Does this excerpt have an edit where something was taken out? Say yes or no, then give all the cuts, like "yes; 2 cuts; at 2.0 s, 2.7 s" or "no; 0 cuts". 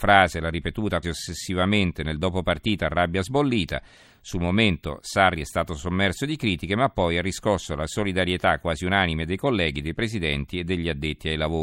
yes; 1 cut; at 1.0 s